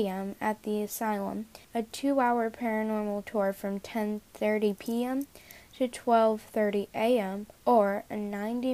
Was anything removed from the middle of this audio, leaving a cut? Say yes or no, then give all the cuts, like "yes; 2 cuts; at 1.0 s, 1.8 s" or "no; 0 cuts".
yes; 2 cuts; at 1.6 s, 7.6 s